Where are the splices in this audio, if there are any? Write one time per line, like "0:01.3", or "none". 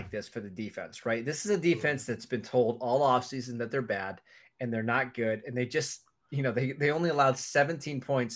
none